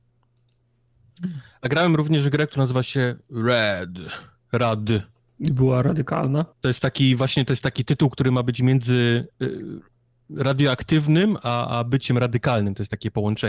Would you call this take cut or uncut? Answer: cut